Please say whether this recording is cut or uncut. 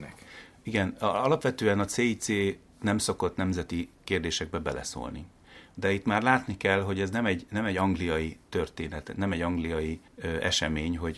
cut